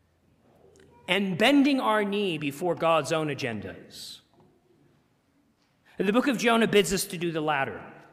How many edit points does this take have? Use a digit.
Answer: 0